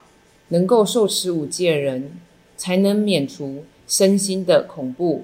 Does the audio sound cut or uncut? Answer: uncut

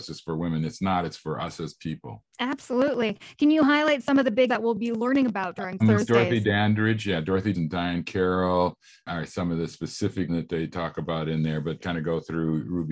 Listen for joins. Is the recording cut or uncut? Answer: cut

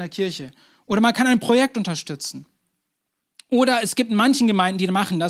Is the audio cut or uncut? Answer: uncut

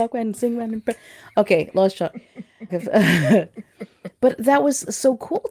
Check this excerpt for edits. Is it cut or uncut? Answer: cut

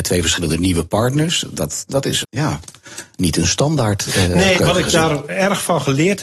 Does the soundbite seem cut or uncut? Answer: cut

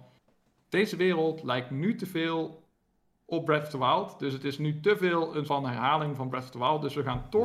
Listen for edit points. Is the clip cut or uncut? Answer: cut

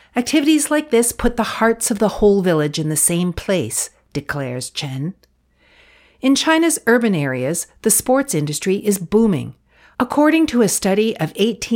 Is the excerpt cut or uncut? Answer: uncut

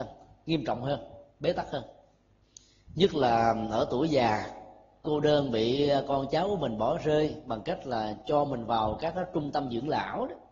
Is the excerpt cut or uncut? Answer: cut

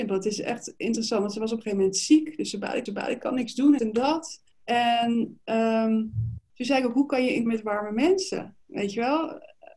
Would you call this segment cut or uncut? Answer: cut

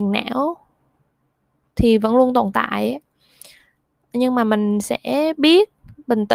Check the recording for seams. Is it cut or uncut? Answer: uncut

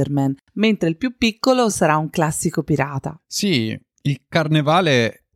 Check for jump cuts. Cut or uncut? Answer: uncut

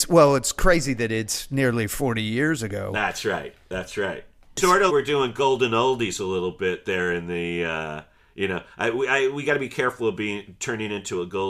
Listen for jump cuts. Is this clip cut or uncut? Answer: cut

